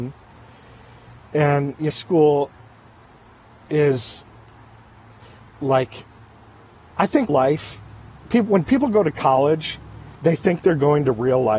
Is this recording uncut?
no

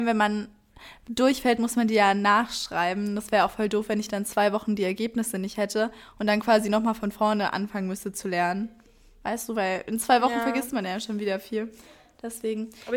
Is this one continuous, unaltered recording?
yes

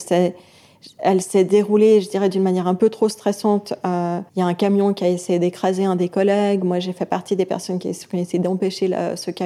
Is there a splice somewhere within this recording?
yes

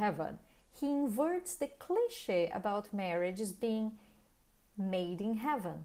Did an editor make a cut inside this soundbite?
no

